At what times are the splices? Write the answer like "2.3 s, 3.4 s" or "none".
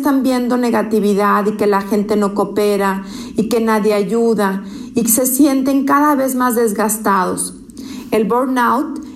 none